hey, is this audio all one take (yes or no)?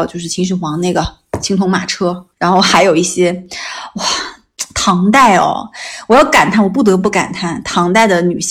no